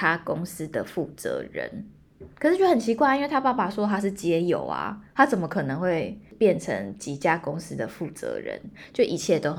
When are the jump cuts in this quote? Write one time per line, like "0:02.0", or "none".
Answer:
0:05.1

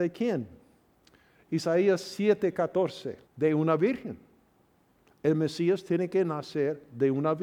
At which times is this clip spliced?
0:03.2

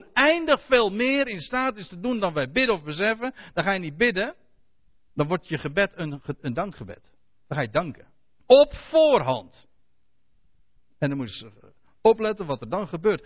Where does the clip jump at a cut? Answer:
none

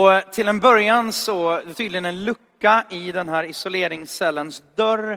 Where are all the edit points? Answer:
0:01.7

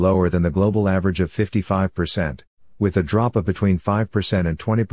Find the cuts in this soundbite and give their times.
none

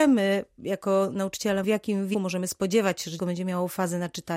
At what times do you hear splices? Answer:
0:01.6
0:02.1
0:03.2

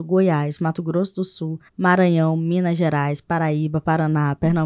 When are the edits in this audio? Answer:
0:01.7

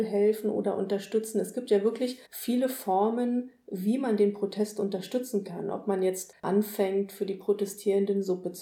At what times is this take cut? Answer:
0:02.2
0:06.4

